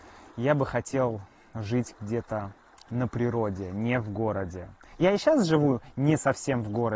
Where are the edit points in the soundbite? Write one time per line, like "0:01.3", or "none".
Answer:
none